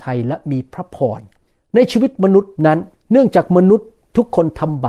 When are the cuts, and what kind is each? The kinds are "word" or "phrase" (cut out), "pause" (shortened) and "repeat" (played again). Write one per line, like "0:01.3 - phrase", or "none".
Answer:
0:01.5 - pause
0:02.6 - pause
0:02.9 - pause